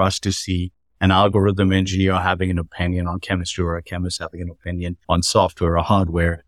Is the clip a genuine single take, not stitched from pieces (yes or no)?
no